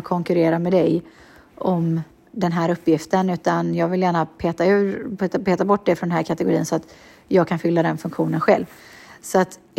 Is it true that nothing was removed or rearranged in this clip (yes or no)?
yes